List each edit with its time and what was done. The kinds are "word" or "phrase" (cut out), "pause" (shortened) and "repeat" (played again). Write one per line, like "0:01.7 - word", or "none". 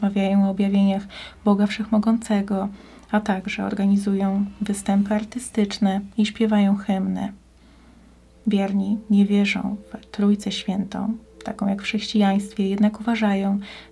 none